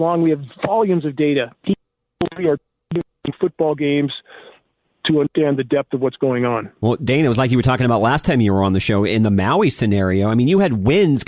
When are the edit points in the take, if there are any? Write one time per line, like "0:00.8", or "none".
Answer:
none